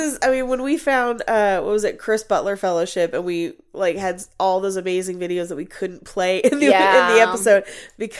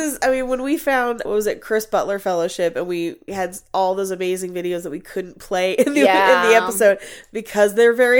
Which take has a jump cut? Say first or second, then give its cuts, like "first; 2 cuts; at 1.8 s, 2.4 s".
second; 2 cuts; at 1.3 s, 3.3 s